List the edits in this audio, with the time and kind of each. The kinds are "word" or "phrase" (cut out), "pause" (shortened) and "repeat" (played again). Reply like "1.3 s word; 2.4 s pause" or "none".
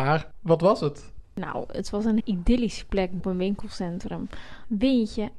2.2 s word; 3.2 s word